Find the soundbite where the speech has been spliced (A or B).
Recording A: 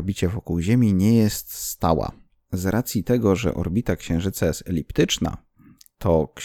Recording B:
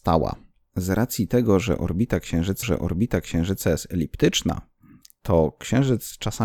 B